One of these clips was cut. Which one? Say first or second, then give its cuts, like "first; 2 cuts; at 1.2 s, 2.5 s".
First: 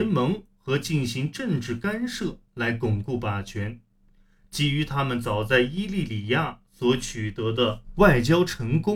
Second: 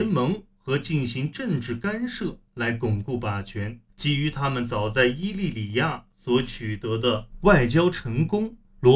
second; 1 cut; at 3.9 s